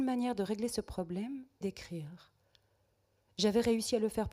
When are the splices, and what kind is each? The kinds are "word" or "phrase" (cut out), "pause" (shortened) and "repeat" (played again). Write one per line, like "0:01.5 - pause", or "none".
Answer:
0:01.6 - word

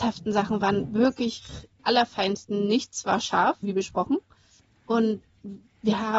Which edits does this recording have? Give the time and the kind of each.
0:01.8 - word
0:03.6 - word

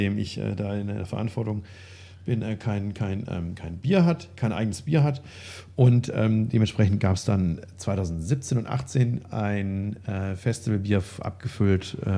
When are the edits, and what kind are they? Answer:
none

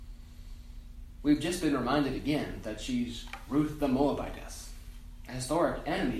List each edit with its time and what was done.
none

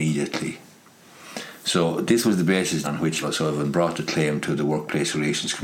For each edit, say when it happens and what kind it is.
0:02.8 - word
0:03.2 - word

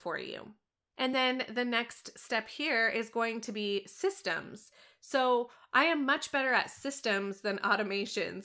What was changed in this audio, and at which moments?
none

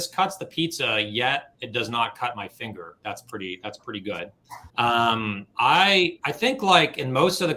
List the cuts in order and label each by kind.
0:04.7 - pause

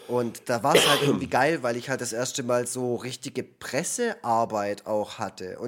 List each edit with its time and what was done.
none

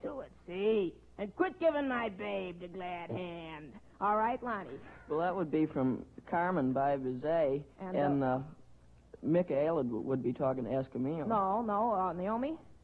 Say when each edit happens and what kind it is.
0:07.7 - pause

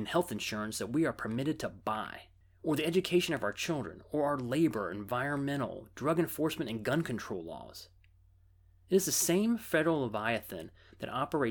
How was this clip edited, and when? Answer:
none

